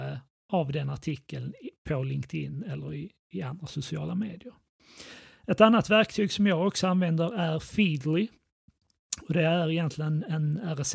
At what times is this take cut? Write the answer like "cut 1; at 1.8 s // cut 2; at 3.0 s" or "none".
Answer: none

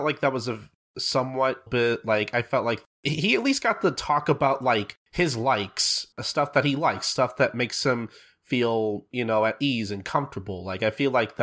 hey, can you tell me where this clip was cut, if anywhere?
cut 1; at 1.7 s // cut 2; at 2.9 s // cut 3; at 5.0 s // cut 4; at 6.1 s

